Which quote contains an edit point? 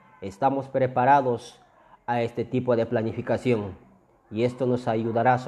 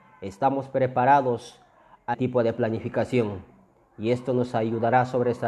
second; 1 cut; at 2.1 s

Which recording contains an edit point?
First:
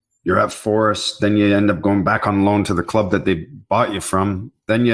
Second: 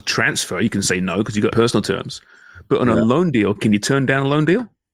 second; 2 cuts; at 1.5 s, 3.6 s

